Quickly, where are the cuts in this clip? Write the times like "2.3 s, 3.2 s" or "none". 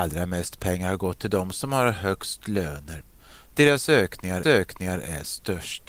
4.4 s